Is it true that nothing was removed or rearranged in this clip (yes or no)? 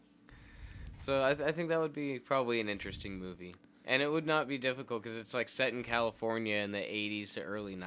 yes